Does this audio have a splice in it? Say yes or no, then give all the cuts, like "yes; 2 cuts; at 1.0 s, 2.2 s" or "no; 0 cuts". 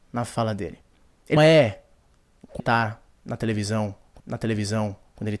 yes; 3 cuts; at 1.4 s, 2.6 s, 4.2 s